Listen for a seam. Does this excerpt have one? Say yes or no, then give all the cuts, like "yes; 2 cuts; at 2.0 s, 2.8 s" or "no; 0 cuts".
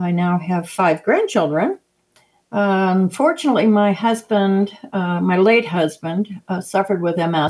no; 0 cuts